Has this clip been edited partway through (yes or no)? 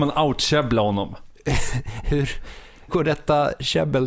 yes